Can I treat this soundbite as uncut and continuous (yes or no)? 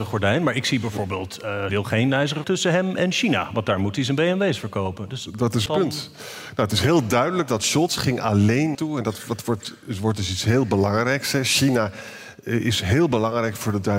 no